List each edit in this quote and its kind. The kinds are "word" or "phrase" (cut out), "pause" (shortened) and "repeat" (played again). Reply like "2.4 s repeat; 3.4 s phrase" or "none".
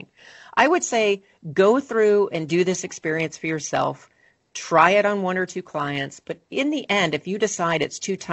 none